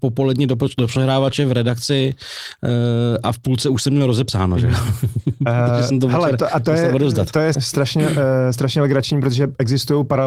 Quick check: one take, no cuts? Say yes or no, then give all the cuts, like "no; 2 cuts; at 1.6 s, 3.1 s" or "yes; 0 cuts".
no; 1 cut; at 7.5 s